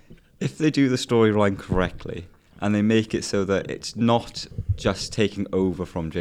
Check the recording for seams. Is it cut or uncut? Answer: uncut